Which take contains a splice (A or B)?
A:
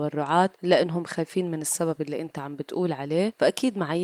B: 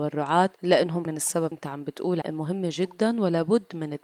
B